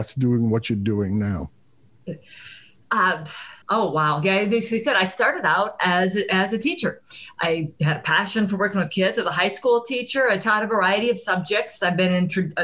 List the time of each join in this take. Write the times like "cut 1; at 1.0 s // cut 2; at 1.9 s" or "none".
cut 1; at 3.6 s